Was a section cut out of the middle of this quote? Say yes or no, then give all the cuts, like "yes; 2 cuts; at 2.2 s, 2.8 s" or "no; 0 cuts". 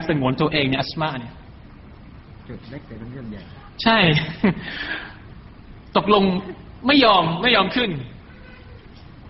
no; 0 cuts